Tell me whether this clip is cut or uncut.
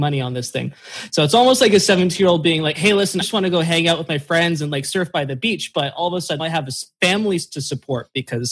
cut